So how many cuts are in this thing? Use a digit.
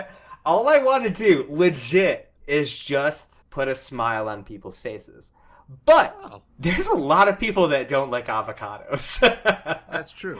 3